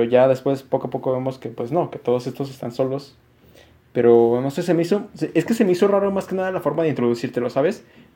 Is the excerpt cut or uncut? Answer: uncut